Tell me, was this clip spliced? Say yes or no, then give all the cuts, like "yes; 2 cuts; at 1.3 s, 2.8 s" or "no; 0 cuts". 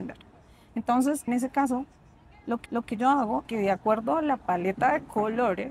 yes; 3 cuts; at 1.3 s, 2.7 s, 3.4 s